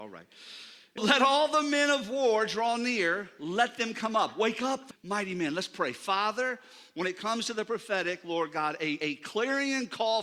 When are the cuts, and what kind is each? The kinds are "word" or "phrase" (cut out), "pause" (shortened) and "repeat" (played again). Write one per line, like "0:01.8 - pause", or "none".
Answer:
0:01.0 - word
0:04.9 - word
0:09.0 - word